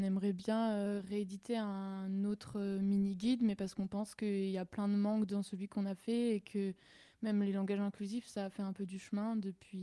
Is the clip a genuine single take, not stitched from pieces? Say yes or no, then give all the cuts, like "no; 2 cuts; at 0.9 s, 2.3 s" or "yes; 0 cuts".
yes; 0 cuts